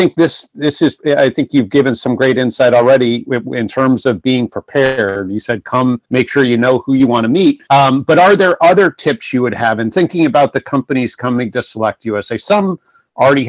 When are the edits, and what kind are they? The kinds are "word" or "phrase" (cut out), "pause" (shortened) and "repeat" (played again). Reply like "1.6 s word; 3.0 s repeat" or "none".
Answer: 6.0 s pause; 7.7 s pause